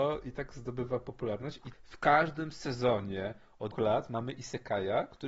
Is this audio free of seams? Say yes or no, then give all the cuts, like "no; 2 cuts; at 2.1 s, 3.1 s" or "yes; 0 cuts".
no; 2 cuts; at 1.7 s, 3.7 s